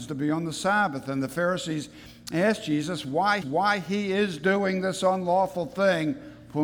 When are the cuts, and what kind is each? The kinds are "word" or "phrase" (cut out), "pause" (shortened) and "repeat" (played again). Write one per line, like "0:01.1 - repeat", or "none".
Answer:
0:03.4 - repeat